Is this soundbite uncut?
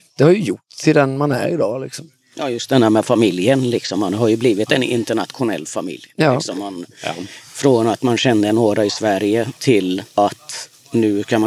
yes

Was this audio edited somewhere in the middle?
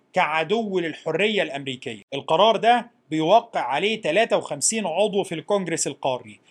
no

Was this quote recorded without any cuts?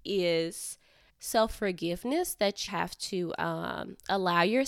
no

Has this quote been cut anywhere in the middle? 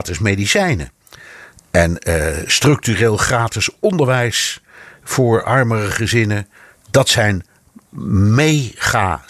no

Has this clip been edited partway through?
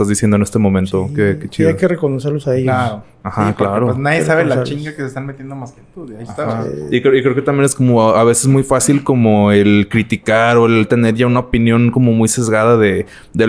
no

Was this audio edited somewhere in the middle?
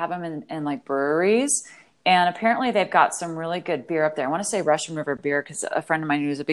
no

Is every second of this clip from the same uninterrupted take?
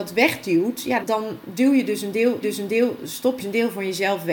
no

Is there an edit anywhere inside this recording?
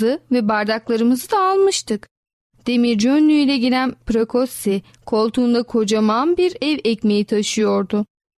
no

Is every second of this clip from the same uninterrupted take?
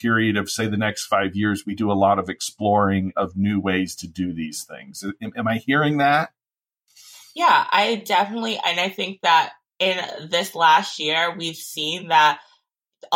yes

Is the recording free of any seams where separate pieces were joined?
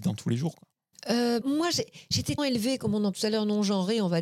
no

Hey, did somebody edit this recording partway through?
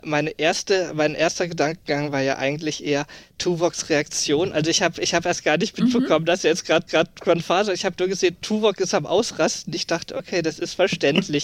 yes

